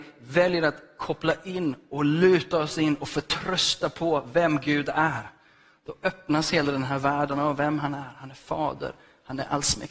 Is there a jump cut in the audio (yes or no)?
no